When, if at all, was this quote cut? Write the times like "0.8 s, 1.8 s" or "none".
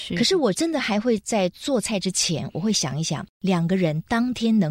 3.3 s